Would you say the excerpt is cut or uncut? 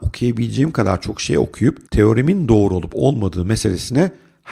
cut